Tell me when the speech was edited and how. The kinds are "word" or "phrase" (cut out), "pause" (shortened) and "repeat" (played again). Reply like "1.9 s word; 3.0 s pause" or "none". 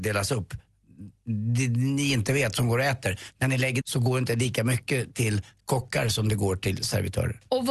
3.8 s word

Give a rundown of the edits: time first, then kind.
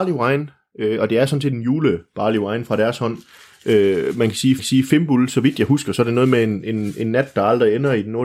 4.6 s repeat

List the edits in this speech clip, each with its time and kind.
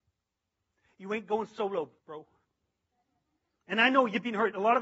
2.0 s pause

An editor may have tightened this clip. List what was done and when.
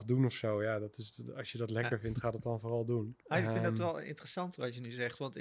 3.2 s pause

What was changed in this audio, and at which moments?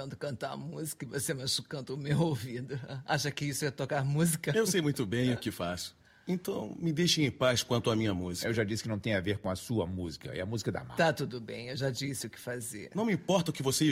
6.1 s pause

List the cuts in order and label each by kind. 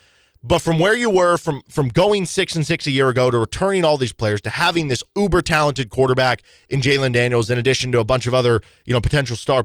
5.1 s pause

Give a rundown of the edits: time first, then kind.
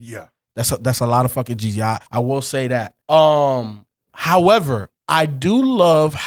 2.1 s pause; 3.0 s pause; 5.0 s pause

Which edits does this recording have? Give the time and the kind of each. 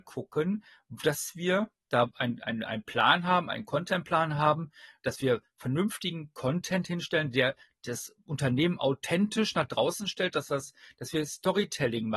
none

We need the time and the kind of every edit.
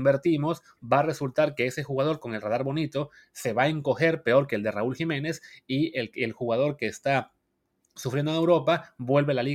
none

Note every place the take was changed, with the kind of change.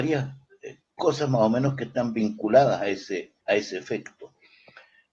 3.4 s pause

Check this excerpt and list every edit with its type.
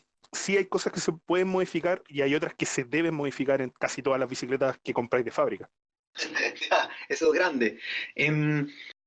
none

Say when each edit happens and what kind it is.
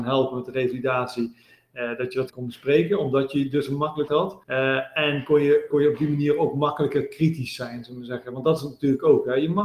2.3 s phrase; 4.1 s word; 4.4 s pause; 5.7 s word

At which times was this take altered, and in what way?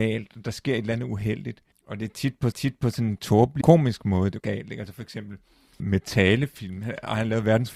1.7 s pause; 2.5 s repeat; 3.6 s word; 4.4 s word; 5.8 s word

